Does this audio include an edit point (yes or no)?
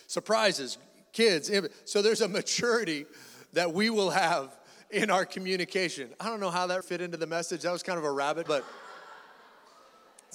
yes